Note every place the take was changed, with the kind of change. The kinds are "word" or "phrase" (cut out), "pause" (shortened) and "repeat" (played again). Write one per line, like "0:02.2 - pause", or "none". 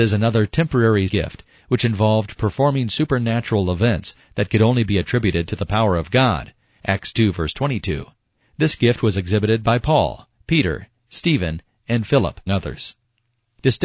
0:01.1 - word
0:12.5 - word